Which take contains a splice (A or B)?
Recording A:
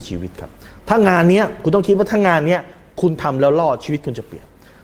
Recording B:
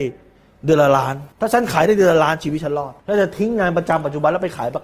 B